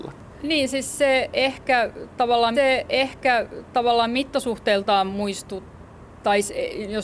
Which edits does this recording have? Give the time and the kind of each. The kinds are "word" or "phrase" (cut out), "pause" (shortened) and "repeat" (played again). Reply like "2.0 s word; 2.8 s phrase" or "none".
2.5 s repeat